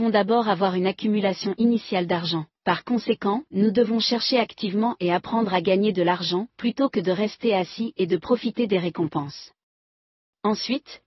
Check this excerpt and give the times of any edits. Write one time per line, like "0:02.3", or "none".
0:02.5
0:03.5
0:06.5